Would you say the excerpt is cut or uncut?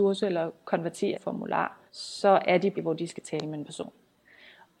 cut